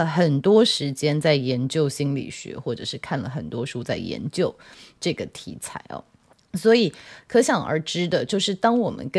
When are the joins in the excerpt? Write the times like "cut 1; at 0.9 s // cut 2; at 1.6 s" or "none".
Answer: none